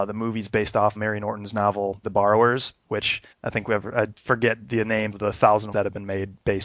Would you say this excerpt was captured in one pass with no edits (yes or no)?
no